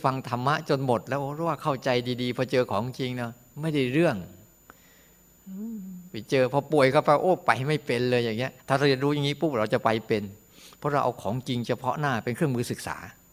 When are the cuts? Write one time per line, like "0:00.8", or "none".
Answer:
0:08.6